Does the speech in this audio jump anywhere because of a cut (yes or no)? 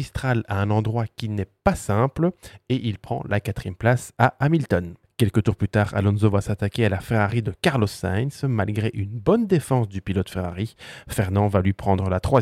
no